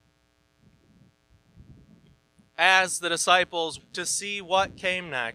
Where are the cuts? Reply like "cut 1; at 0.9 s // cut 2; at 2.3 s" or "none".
cut 1; at 3.8 s